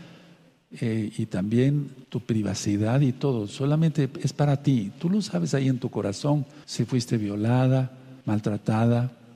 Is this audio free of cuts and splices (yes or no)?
no